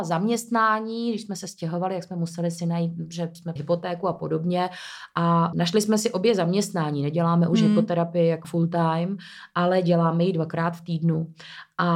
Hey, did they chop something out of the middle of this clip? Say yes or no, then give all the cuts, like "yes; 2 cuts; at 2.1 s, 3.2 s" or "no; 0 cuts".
yes; 3 cuts; at 3.6 s, 5.5 s, 8.4 s